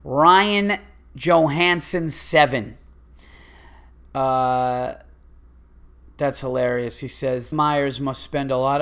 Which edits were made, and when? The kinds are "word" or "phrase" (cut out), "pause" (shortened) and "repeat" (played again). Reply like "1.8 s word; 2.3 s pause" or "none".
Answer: 7.5 s phrase

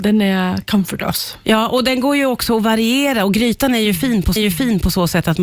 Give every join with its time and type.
1.0 s phrase; 4.4 s repeat

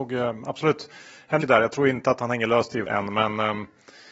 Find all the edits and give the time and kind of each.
1.4 s word; 2.9 s word

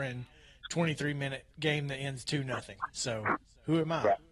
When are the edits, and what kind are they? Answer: 1.5 s pause

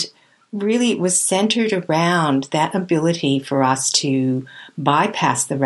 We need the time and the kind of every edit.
none

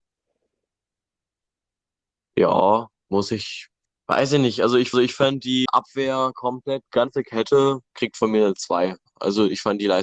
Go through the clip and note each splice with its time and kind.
3.0 s pause; 3.8 s pause; 4.9 s repeat; 5.7 s word; 6.8 s word; 7.8 s pause

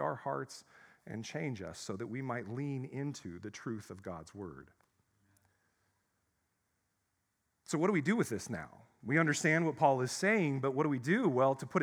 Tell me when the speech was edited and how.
none

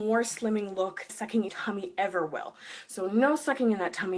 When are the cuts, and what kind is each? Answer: 1.1 s word; 1.5 s word

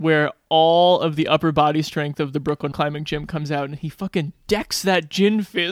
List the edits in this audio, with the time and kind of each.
2.7 s word

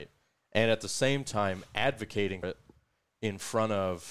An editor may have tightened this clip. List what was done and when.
2.4 s word

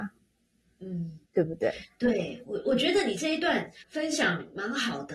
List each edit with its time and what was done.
1.2 s pause; 3.8 s pause

